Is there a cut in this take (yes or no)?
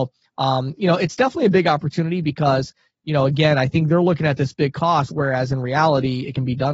no